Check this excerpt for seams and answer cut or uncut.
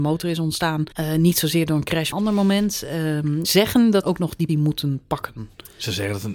cut